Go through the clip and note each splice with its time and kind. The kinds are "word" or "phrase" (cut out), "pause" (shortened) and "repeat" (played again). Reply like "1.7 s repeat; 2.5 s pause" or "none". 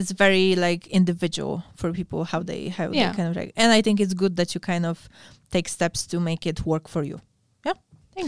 none